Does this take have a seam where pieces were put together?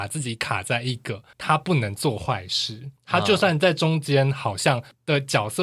yes; 2 cuts; at 1.3 s, 3.0 s

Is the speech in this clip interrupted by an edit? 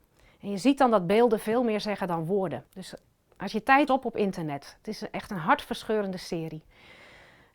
yes; 2 cuts; at 2.7 s, 3.9 s

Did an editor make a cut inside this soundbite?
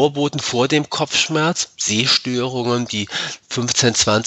no; 0 cuts

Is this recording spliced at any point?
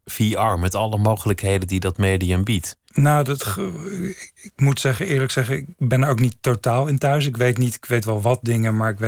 yes; 1 cut; at 2.8 s

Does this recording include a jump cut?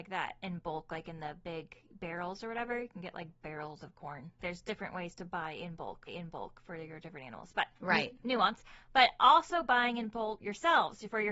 yes; 4 cuts; at 4.4 s, 6.1 s, 7.8 s, 10.4 s

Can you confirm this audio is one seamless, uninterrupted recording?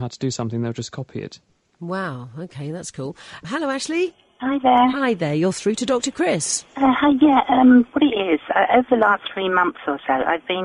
yes; 0 cuts

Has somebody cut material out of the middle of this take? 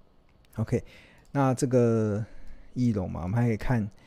no; 0 cuts

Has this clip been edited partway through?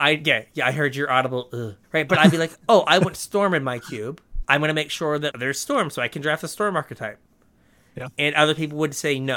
yes; 3 cuts; at 1.8 s, 4.4 s, 5.3 s

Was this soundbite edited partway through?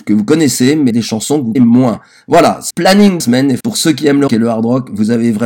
yes; 6 cuts; at 0.9 s, 1.6 s, 2.7 s, 3.2 s, 3.6 s, 4.3 s

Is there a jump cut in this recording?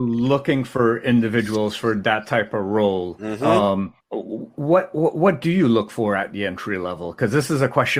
yes; 1 cut; at 4.0 s

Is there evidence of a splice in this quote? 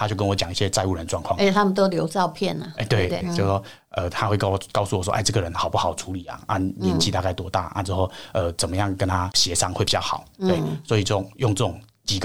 yes; 1 cut; at 3.2 s

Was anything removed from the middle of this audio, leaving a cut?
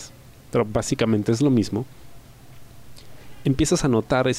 no; 0 cuts

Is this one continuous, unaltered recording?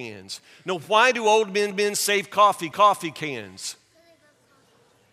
no; 2 cuts; at 1.7 s, 2.7 s

